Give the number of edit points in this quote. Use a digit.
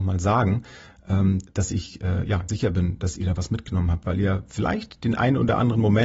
2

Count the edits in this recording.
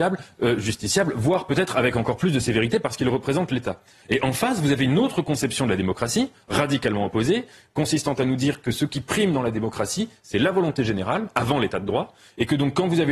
0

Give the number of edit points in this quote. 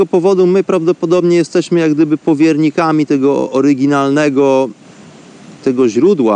0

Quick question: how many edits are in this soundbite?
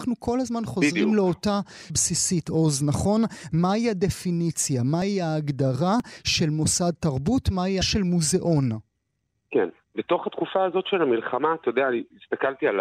2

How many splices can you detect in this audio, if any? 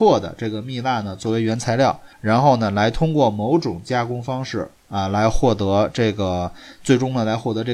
2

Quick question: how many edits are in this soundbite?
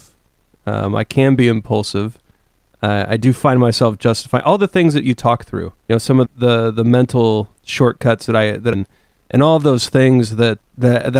4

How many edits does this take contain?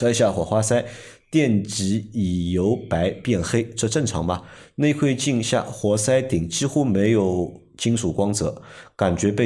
0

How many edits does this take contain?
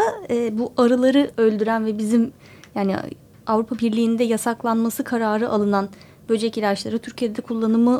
0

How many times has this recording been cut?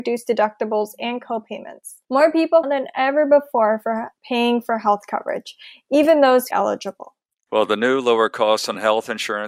4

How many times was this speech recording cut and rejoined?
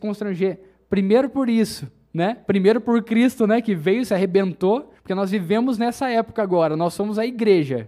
1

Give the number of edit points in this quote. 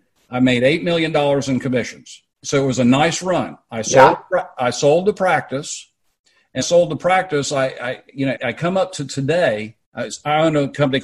4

